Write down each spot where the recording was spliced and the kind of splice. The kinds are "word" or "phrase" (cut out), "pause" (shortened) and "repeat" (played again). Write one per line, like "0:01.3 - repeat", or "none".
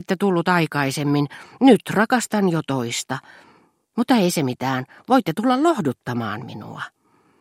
none